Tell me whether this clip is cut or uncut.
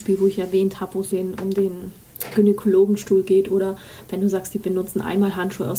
cut